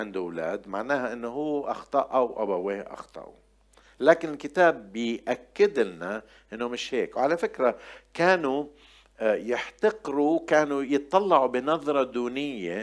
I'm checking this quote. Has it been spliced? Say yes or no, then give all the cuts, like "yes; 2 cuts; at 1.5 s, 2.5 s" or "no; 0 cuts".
no; 0 cuts